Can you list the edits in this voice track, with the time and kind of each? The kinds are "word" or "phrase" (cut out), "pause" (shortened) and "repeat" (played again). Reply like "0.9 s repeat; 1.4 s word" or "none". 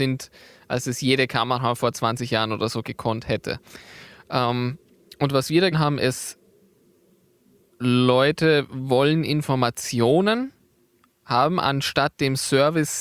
5.7 s word